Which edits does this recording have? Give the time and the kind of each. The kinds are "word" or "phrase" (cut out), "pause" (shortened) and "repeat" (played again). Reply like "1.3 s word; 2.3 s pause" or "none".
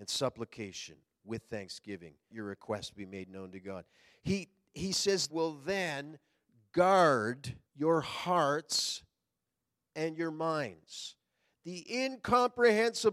2.3 s word; 5.3 s phrase; 7.7 s pause